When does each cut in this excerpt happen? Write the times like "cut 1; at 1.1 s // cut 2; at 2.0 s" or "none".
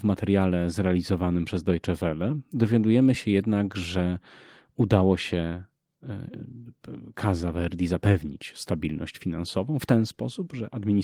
none